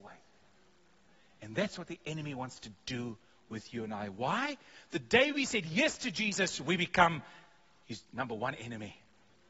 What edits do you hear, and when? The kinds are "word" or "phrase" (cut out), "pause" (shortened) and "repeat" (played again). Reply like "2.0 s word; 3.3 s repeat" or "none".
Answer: none